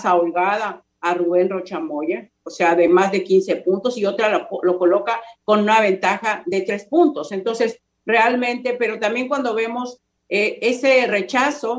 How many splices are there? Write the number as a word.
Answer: zero